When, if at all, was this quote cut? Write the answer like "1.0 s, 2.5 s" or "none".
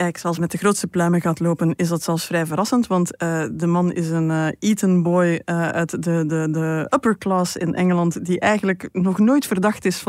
none